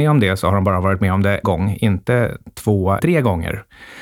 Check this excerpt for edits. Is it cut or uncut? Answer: cut